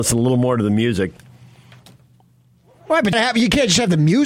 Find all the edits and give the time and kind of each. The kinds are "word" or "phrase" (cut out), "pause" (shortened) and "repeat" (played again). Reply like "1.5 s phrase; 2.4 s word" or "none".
3.1 s word